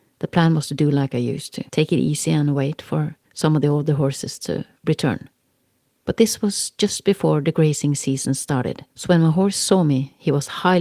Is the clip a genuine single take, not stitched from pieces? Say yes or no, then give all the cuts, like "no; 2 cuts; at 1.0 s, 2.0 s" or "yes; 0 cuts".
no; 4 cuts; at 1.7 s, 3.2 s, 5.5 s, 8.9 s